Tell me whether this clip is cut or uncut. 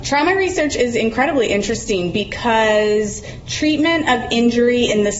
uncut